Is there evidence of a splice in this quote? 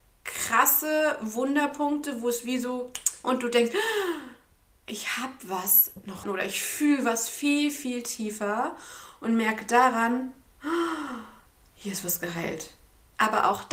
yes; 2 cuts; at 3.2 s, 6.2 s

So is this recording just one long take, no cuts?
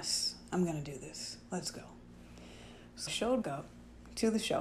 no; 2 cuts; at 3.1 s, 3.4 s

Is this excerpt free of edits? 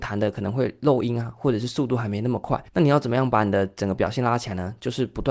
no; 1 cut; at 2.7 s

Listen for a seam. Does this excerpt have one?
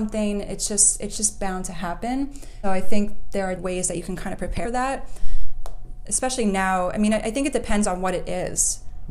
yes; 3 cuts; at 2.6 s, 3.6 s, 4.6 s

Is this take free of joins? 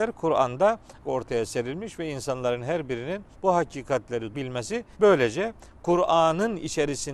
no; 4 cuts; at 1.0 s, 3.3 s, 4.3 s, 4.9 s

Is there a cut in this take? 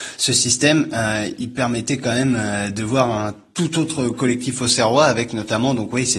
no; 0 cuts

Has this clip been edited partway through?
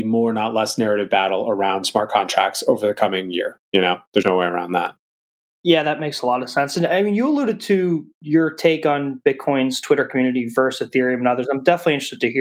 yes; 1 cut; at 4.2 s

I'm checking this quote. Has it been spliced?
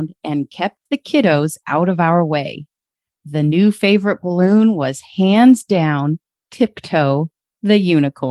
no; 0 cuts

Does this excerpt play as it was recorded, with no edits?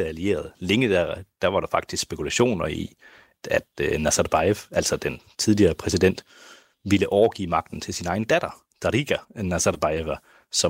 no; 1 cut; at 9.2 s

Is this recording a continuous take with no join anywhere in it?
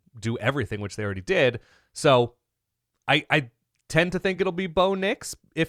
yes; 0 cuts

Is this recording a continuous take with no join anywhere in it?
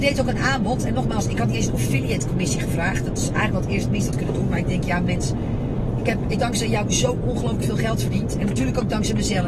no; 2 cuts; at 4.1 s, 6.4 s

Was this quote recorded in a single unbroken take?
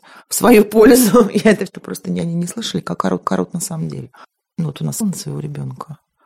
no; 4 cuts; at 1.7 s, 3.2 s, 4.2 s, 5.0 s

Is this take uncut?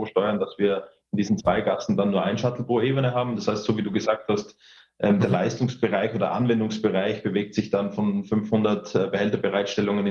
yes; 0 cuts

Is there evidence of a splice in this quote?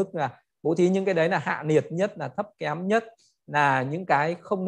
no; 0 cuts

